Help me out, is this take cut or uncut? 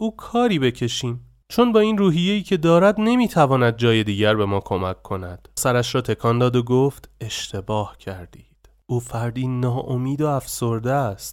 cut